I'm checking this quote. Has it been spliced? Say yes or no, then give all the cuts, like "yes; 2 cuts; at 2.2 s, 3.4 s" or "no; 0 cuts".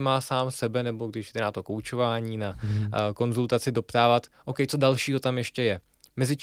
no; 0 cuts